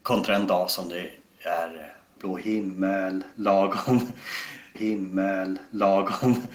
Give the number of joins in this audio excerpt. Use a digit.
2